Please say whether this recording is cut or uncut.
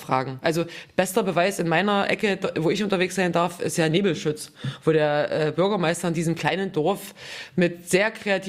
uncut